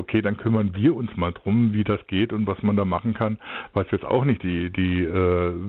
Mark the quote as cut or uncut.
uncut